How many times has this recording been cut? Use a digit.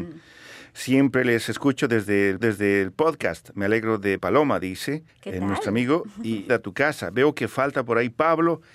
4